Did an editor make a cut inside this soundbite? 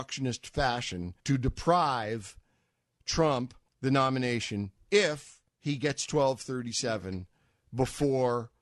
yes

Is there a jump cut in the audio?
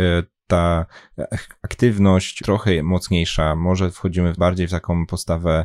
yes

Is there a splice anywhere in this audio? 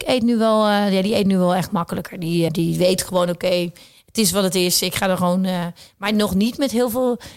yes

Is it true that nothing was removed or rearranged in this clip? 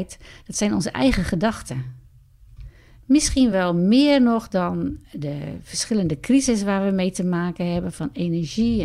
yes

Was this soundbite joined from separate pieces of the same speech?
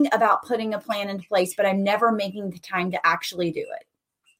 no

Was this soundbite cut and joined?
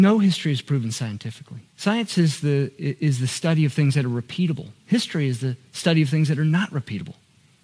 yes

